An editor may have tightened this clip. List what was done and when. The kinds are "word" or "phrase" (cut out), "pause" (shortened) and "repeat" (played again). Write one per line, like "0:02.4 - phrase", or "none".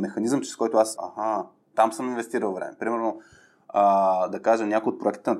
0:01.0 - word
0:01.7 - word